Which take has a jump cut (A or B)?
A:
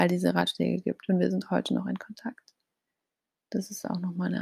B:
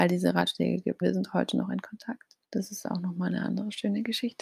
B